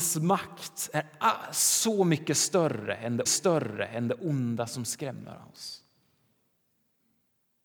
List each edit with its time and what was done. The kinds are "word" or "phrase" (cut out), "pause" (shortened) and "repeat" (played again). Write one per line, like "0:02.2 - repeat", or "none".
0:03.3 - repeat